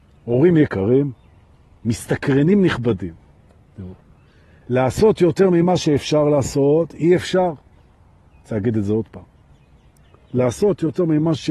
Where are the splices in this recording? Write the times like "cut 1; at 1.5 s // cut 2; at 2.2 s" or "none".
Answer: none